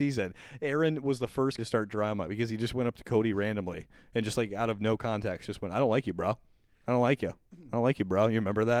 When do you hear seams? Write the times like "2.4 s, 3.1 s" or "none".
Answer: 1.6 s